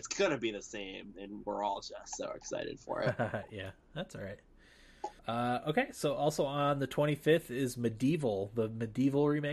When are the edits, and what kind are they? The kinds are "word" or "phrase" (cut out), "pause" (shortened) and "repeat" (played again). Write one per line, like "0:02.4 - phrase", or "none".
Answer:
0:05.2 - pause